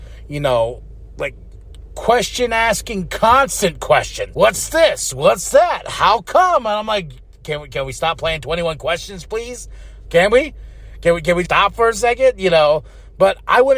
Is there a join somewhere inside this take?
yes; 3 cuts; at 4.3 s, 7.7 s, 11.4 s

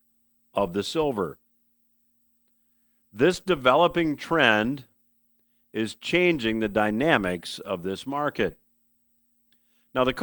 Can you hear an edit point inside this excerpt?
no; 0 cuts

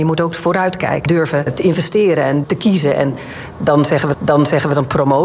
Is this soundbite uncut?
no; 4 cuts; at 1.1 s, 1.5 s, 2.4 s, 4.1 s

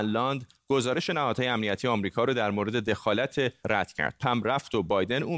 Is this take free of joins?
no; 2 cuts; at 3.6 s, 4.2 s

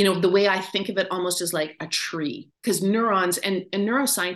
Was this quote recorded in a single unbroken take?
no; 1 cut; at 2.6 s

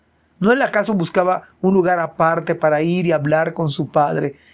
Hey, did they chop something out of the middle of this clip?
no; 0 cuts

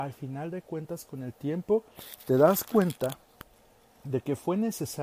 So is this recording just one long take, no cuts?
yes; 0 cuts

